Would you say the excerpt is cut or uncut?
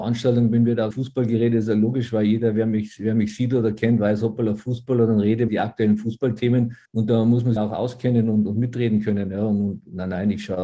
cut